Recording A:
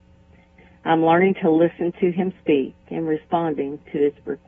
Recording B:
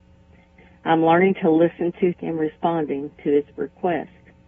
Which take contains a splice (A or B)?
B